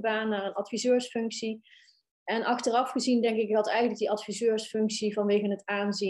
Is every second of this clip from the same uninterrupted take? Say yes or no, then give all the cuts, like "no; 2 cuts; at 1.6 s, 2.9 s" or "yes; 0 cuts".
yes; 0 cuts